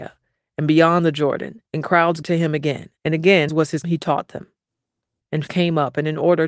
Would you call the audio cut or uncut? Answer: cut